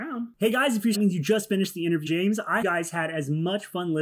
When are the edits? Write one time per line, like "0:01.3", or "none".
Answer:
0:00.9
0:02.1
0:02.6